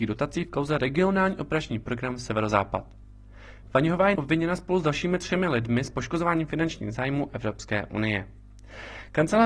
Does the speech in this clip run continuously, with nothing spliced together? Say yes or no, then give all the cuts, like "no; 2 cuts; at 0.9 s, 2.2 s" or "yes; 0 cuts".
no; 1 cut; at 4.2 s